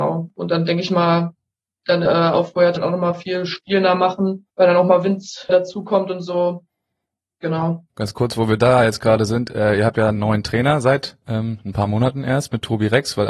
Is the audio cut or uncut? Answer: cut